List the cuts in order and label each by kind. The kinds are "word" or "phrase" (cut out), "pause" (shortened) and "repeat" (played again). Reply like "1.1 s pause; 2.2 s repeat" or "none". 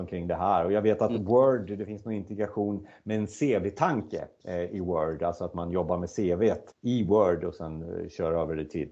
6.7 s pause